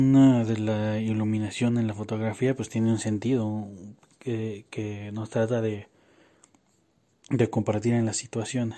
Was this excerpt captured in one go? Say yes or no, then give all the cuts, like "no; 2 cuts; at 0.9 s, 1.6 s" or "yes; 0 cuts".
yes; 0 cuts